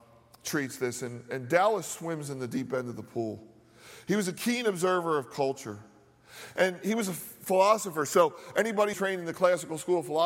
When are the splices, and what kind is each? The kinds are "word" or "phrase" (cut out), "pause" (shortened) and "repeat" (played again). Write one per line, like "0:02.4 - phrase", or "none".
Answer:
0:08.9 - phrase